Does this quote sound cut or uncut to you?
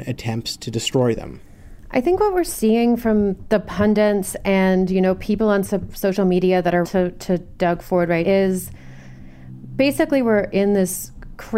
cut